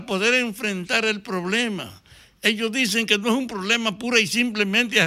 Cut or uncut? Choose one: uncut